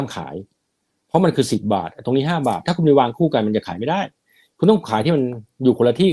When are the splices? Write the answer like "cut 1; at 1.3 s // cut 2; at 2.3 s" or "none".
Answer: none